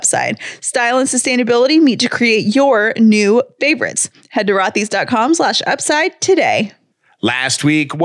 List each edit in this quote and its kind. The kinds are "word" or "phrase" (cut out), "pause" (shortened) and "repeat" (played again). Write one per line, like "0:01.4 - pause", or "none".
none

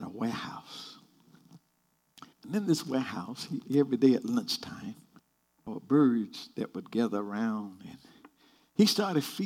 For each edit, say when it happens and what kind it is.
0:02.3 - pause
0:05.2 - pause

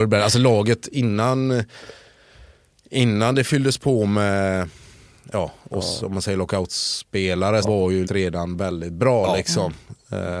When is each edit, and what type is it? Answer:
0:07.6 - word
0:08.0 - word

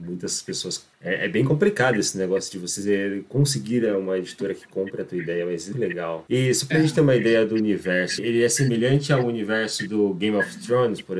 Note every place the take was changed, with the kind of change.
0:05.7 - word
0:08.2 - word

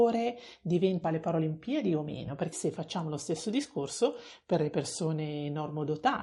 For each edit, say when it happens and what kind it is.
0:01.0 - phrase
0:02.5 - word

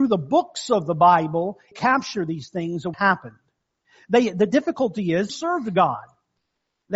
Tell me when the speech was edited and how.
0:01.7 - phrase
0:02.9 - word
0:05.3 - phrase

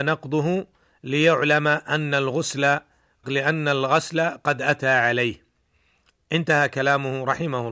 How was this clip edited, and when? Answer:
0:03.2 - word

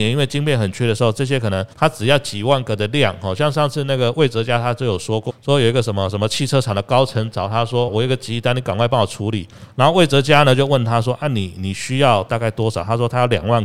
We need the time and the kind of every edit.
0:01.7 - pause
0:05.3 - word
0:07.9 - word

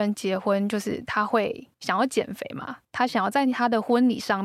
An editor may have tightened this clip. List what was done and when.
0:01.7 - pause
0:02.8 - pause

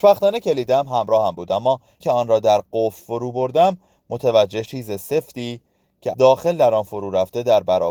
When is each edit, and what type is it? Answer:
0:02.0 - word
0:04.7 - word
0:06.1 - word

